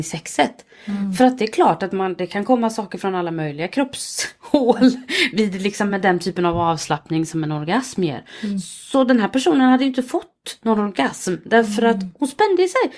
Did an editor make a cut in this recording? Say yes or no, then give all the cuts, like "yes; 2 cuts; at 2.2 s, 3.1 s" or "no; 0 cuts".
no; 0 cuts